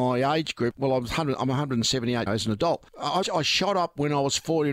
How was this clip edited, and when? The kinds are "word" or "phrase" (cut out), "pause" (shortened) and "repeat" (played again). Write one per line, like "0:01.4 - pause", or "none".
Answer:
0:02.3 - phrase
0:03.2 - word

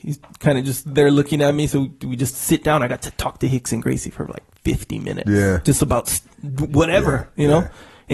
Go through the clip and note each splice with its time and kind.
none

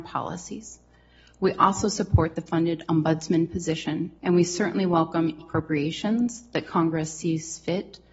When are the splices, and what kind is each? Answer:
0:04.2 - pause
0:05.4 - phrase

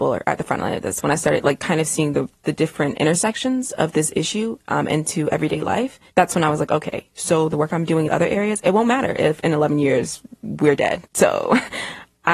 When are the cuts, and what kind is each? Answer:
0:06.1 - pause
0:08.1 - phrase
0:11.1 - pause

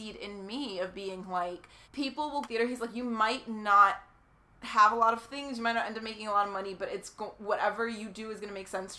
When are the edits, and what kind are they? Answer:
0:01.8 - pause
0:02.4 - phrase

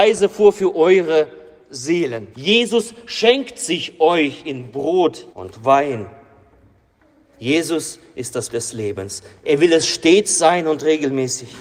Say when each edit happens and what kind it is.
0:02.3 - pause
0:05.3 - pause
0:08.5 - word

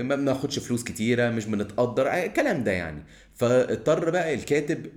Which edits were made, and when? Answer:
none

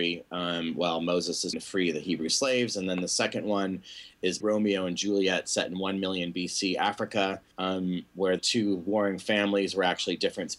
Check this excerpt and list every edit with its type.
0:01.5 - word
0:04.4 - word
0:07.5 - pause
0:08.4 - word

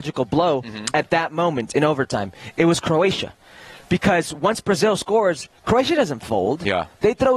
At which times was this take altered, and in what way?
none

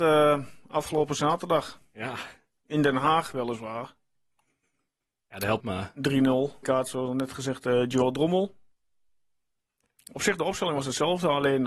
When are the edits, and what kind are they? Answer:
0:05.6 - phrase
0:06.6 - word

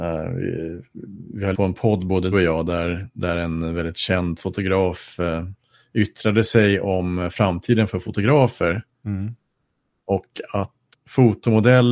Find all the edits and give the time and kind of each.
0:01.5 - word
0:02.3 - word
0:10.9 - word

